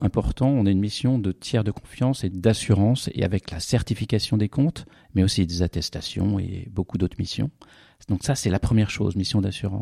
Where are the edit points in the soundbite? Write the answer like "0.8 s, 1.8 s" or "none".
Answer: 2.3 s